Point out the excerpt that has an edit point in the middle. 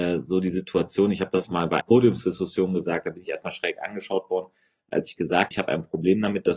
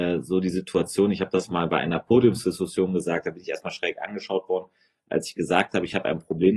first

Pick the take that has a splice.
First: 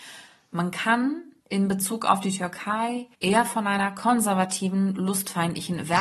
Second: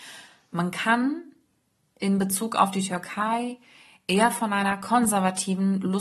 first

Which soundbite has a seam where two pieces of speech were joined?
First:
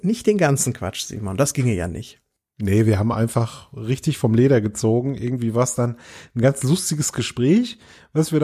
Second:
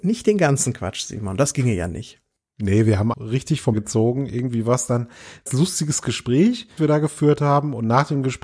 second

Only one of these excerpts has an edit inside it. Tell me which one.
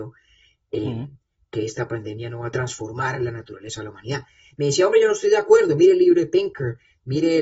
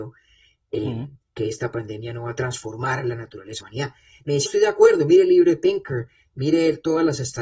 second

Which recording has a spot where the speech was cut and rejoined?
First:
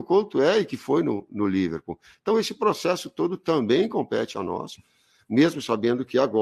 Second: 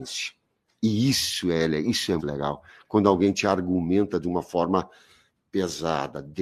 second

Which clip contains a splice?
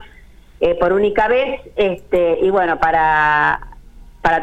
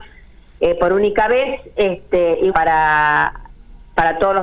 second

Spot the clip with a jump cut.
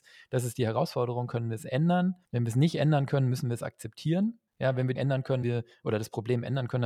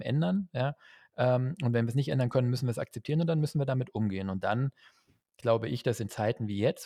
first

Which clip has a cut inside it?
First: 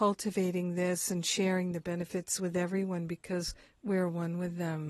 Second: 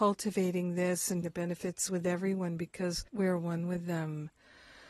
second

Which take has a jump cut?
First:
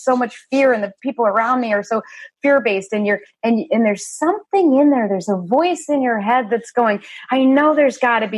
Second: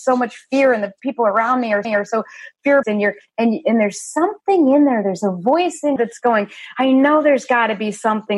second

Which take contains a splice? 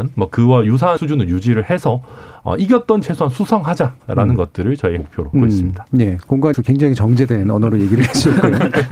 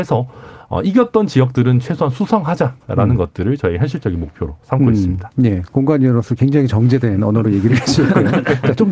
first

